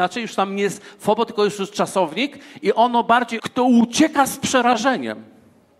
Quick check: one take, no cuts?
no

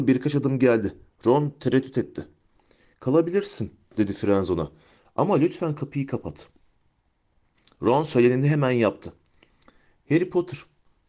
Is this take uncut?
yes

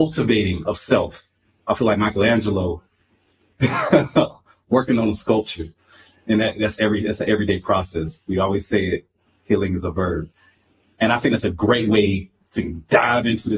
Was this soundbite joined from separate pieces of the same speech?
no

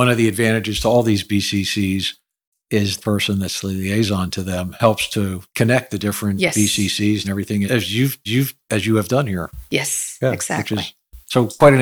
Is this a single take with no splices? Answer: no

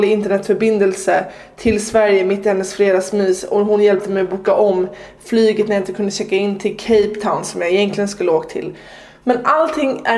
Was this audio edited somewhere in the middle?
no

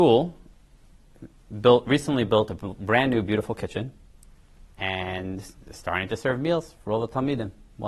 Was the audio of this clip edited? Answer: no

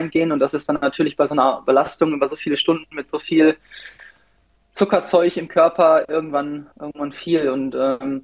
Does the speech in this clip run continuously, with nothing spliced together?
no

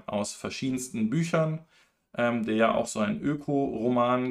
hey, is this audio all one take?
yes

